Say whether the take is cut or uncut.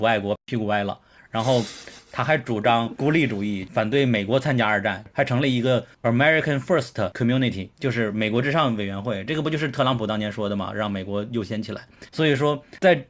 uncut